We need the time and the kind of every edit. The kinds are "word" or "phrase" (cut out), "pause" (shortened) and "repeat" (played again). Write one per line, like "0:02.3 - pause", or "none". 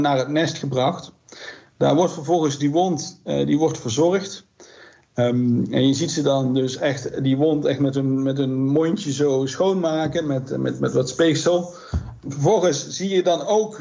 none